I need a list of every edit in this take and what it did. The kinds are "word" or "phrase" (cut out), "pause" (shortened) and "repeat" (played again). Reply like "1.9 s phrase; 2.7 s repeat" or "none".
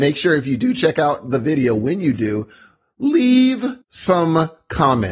3.8 s pause